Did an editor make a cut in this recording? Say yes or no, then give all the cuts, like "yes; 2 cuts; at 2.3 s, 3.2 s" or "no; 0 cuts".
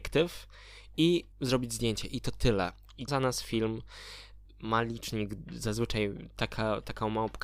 yes; 2 cuts; at 1.3 s, 3.1 s